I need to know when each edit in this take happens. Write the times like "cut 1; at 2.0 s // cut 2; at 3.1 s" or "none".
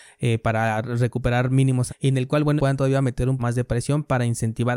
cut 1; at 1.9 s // cut 2; at 2.6 s // cut 3; at 3.4 s